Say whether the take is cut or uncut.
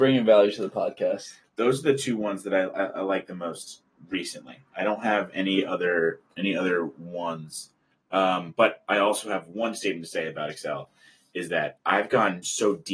uncut